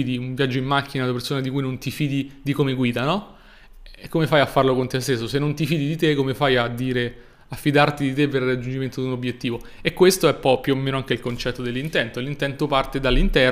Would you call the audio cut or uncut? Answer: uncut